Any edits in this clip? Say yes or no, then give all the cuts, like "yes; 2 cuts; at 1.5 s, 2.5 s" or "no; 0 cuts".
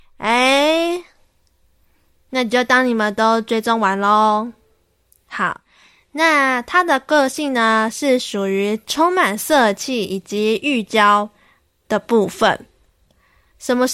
no; 0 cuts